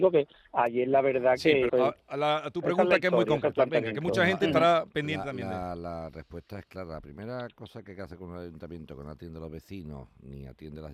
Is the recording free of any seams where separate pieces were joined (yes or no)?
no